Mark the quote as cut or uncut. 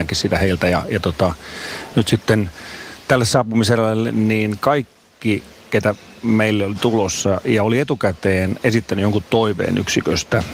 uncut